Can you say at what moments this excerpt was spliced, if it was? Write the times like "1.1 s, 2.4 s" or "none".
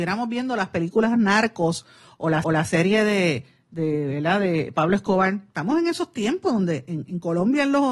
2.4 s